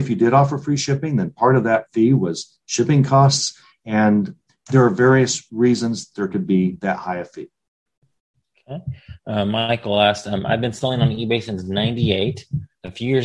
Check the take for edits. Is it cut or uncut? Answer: uncut